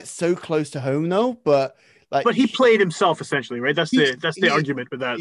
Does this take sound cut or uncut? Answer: uncut